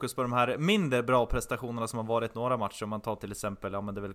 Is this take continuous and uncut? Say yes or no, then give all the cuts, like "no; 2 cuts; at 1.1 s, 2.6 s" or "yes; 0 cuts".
yes; 0 cuts